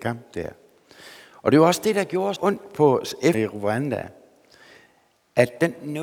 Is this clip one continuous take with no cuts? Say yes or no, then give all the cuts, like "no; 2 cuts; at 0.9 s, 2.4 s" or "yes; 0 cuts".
no; 2 cuts; at 2.4 s, 3.3 s